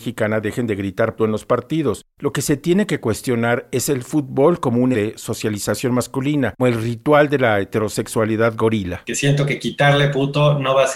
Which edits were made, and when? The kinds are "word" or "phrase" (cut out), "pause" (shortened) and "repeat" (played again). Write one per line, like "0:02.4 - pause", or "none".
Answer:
0:01.2 - word
0:04.9 - word
0:06.6 - word